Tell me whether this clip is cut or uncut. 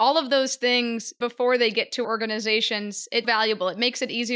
cut